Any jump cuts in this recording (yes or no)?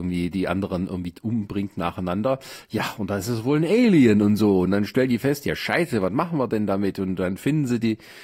no